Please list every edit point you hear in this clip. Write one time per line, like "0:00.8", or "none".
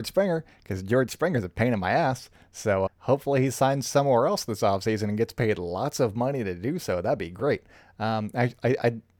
0:02.9